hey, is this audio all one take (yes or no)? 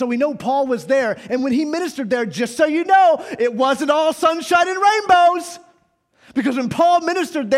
yes